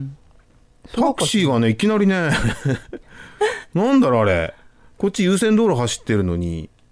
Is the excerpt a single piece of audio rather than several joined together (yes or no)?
yes